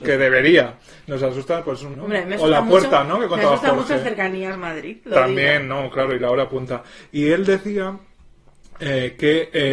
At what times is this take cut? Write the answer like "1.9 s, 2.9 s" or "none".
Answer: 1.9 s

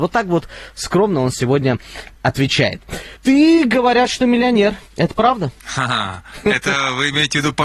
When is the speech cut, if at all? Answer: 3.2 s, 4.9 s, 5.6 s

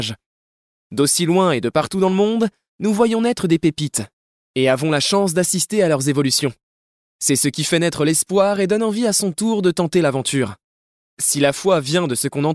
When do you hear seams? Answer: none

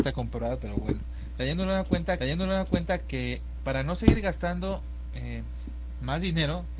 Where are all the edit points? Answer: 2.2 s

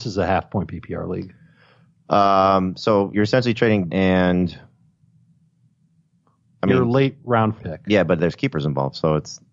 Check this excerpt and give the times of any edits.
3.1 s, 3.9 s, 7.6 s

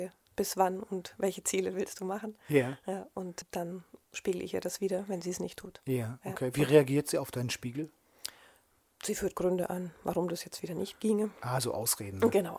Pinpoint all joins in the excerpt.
none

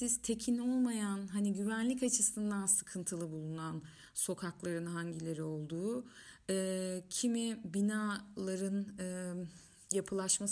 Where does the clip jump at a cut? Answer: none

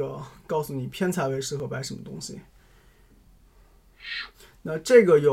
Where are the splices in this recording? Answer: none

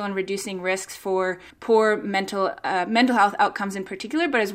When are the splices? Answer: 1.5 s

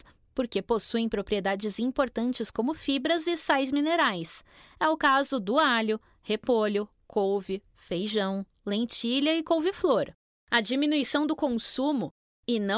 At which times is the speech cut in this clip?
none

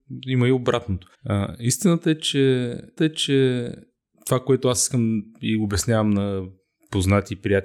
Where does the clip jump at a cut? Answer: 1.1 s, 3.0 s

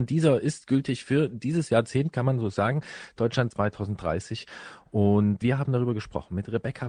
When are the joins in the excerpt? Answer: 3.5 s, 5.4 s

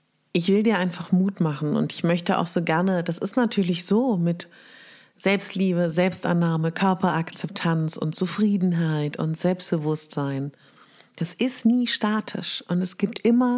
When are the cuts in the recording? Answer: none

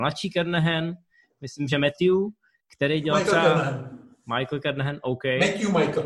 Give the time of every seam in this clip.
none

